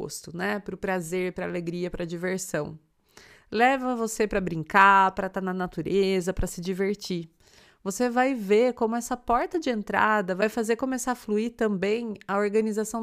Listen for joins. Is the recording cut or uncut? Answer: uncut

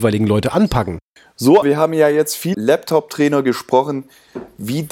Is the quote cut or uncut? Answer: cut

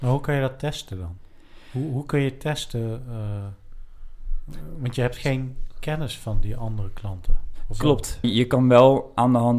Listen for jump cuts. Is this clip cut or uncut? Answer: cut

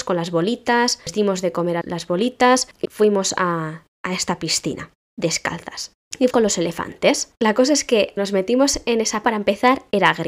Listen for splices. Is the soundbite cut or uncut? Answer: cut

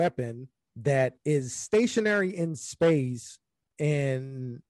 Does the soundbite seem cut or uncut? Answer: cut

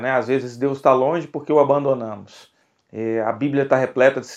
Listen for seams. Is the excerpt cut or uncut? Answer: cut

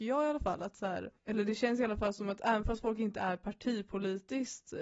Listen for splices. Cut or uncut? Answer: cut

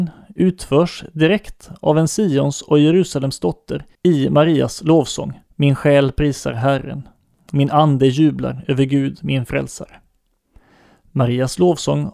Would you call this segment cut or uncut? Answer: cut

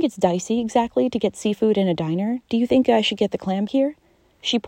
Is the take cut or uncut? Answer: cut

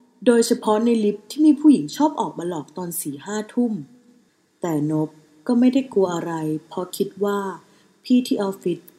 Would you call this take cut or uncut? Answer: uncut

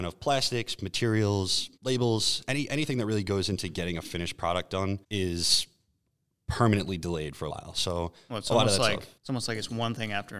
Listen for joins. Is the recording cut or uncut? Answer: cut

